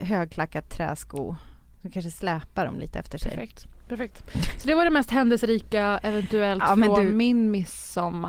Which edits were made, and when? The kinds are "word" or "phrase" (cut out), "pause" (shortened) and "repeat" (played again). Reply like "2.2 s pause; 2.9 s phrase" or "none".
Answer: none